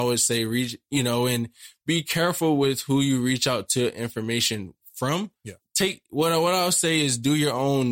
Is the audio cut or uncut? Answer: uncut